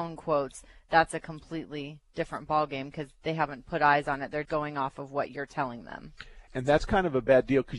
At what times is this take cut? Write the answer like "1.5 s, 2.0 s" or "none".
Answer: 4.4 s, 6.5 s

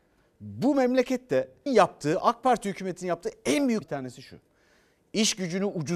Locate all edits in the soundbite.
1.7 s, 3.8 s

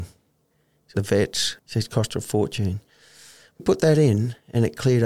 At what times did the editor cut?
0.9 s, 1.6 s, 3.6 s

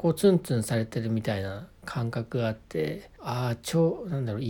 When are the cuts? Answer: 3.2 s

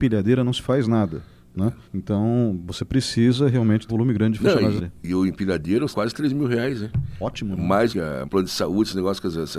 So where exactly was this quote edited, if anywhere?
1.8 s, 3.9 s, 4.8 s, 5.9 s, 7.9 s, 8.2 s

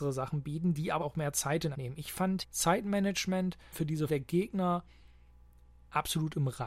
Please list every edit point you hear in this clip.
1.0 s, 1.7 s, 2.4 s, 3.7 s, 4.1 s

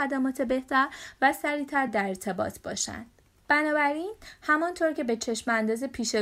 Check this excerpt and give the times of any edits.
none

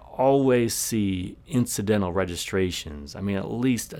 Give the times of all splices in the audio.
none

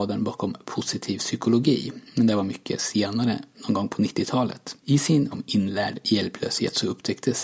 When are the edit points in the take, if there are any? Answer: 4.8 s, 5.3 s

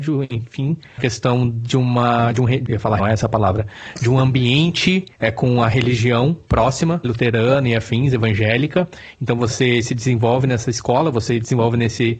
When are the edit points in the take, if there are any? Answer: 1.0 s, 2.7 s, 3.0 s, 5.1 s, 7.0 s

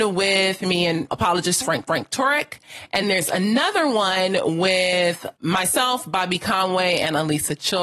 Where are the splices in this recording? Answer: 1.1 s, 1.9 s, 3.0 s, 5.3 s

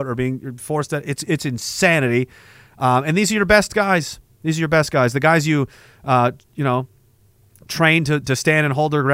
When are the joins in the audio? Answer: 8.2 s

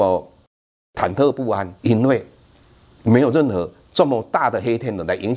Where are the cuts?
1.8 s

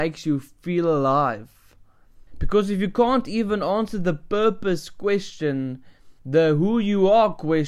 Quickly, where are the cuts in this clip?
2.3 s, 6.2 s

